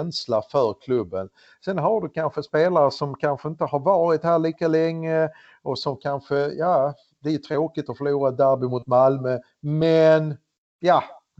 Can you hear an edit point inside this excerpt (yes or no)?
no